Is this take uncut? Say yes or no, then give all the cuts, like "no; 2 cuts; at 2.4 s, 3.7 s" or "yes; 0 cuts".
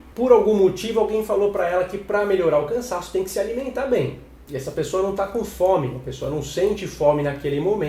yes; 0 cuts